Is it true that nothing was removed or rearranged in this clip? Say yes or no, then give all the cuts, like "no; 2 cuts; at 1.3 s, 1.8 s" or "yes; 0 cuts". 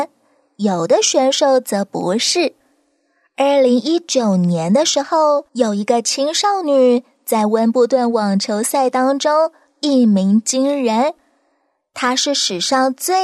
no; 1 cut; at 5.5 s